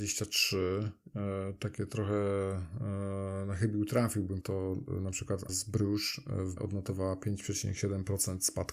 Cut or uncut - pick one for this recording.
cut